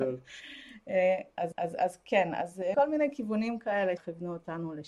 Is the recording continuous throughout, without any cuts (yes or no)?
no